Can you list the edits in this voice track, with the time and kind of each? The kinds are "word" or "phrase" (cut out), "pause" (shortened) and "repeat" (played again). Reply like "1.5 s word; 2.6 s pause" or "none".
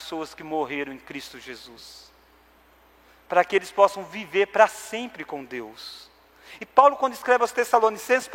none